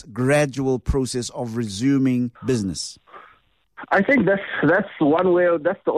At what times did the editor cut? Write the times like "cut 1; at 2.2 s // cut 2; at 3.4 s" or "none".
cut 1; at 2.4 s